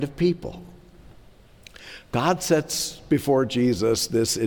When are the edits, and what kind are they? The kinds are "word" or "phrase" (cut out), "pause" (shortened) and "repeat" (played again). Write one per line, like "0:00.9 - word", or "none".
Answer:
none